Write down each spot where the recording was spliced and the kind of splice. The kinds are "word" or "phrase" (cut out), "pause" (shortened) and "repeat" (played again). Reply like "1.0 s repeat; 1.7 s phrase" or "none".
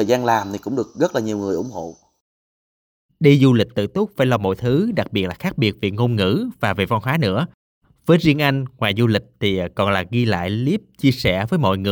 none